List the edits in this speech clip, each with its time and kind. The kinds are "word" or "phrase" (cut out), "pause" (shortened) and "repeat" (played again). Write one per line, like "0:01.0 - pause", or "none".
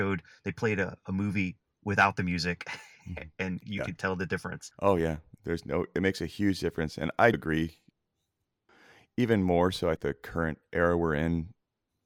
0:04.0 - word
0:07.3 - word
0:10.0 - word